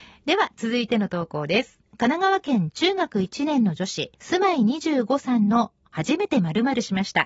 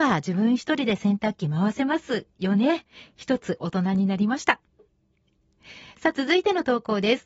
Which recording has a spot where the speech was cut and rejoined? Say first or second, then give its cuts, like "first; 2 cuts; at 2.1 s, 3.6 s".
first; 2 cuts; at 1.9 s, 4.1 s